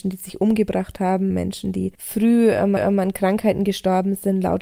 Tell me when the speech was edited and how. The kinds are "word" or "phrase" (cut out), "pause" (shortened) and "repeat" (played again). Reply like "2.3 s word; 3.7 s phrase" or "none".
1.3 s word; 1.9 s pause; 2.8 s repeat